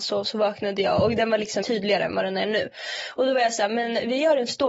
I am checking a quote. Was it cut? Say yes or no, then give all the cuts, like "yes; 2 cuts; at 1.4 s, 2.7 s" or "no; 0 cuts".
yes; 1 cut; at 1.6 s